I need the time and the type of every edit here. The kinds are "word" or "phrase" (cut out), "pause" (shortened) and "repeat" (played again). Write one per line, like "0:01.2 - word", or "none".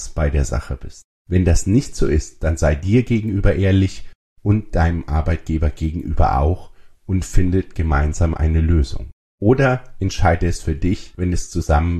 none